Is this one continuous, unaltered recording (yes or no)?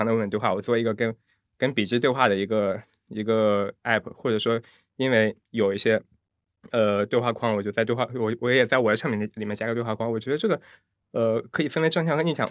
yes